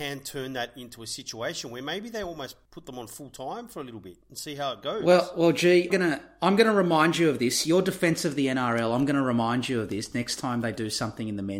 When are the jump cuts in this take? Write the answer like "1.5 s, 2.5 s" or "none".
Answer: 5.9 s